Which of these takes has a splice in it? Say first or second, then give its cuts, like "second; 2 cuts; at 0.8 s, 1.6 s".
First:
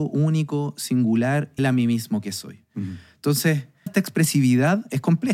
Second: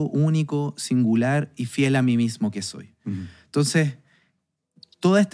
first; 2 cuts; at 1.6 s, 3.9 s